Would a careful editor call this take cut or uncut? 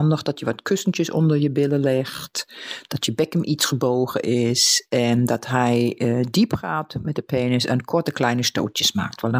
uncut